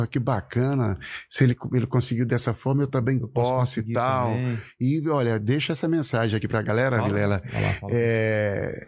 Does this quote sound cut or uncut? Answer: uncut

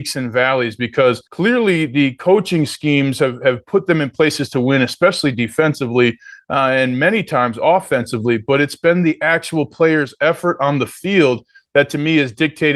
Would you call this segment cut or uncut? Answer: cut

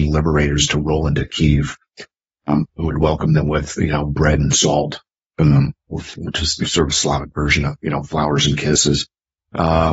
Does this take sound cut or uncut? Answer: uncut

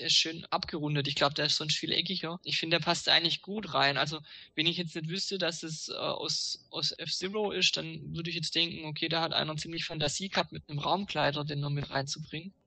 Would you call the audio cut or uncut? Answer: uncut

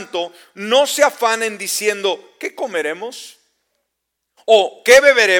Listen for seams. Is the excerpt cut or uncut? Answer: uncut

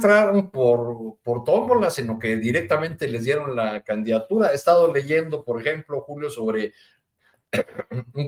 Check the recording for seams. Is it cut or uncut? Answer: uncut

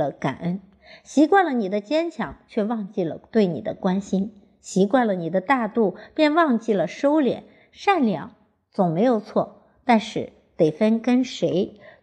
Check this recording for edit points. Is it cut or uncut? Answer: uncut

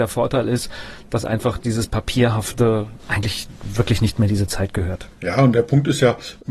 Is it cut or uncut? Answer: cut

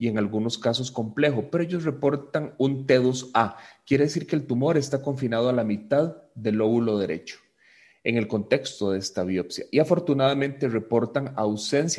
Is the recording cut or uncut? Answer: uncut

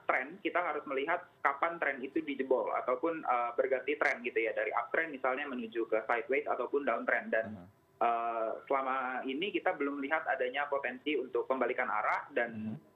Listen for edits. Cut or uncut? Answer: uncut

